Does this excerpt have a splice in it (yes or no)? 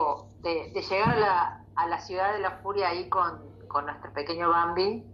no